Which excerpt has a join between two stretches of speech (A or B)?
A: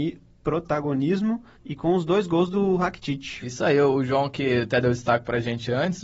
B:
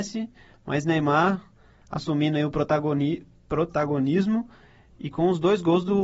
A